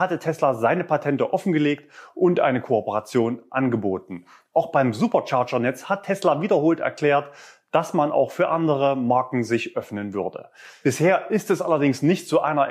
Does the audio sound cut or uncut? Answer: uncut